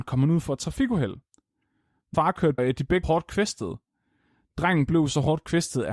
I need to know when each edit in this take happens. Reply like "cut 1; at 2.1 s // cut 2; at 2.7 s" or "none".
cut 1; at 2.1 s // cut 2; at 2.6 s // cut 3; at 3.0 s